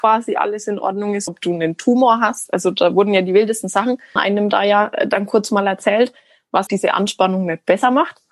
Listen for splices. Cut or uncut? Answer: cut